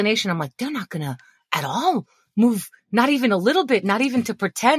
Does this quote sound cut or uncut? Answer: uncut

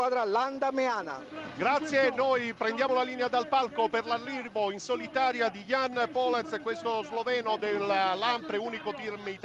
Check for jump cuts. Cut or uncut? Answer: uncut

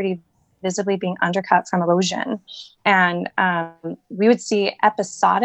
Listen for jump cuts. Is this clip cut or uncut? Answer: uncut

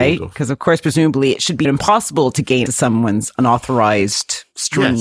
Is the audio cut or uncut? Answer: cut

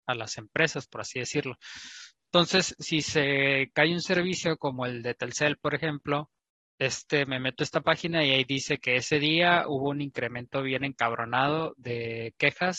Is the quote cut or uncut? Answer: uncut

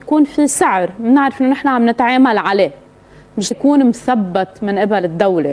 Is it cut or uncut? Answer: cut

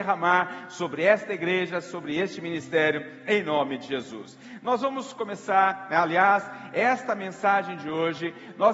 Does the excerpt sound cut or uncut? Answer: uncut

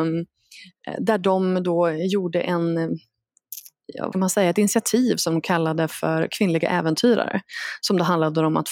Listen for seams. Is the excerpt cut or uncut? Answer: cut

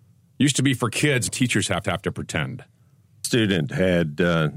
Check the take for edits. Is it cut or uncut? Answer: cut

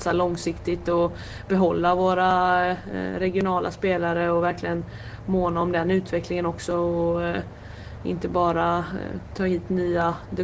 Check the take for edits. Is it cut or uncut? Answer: uncut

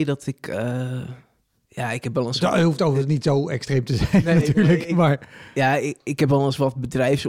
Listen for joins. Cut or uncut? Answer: uncut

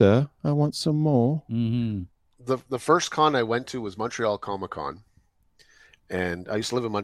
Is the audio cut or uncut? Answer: uncut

